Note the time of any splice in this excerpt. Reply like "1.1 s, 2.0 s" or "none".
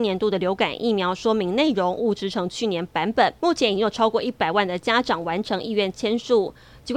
3.4 s